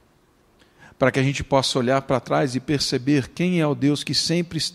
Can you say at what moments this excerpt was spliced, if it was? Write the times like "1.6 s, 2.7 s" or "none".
none